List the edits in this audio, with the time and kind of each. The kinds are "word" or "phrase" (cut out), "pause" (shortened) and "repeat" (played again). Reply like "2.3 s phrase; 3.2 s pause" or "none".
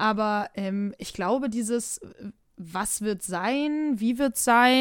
none